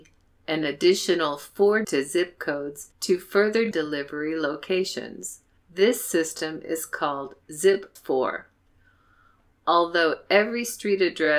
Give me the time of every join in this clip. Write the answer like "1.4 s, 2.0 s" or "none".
1.8 s, 2.9 s, 3.7 s, 5.6 s, 8.0 s